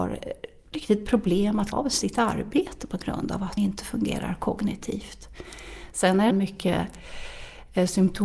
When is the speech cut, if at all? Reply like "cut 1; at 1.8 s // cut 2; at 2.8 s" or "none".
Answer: cut 1; at 1.7 s // cut 2; at 3.6 s // cut 3; at 6.3 s